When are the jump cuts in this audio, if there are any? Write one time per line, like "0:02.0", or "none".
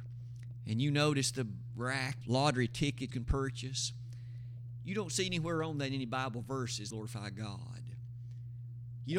0:02.2
0:03.1
0:06.9